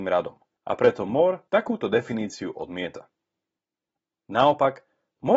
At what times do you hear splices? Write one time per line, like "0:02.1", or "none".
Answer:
none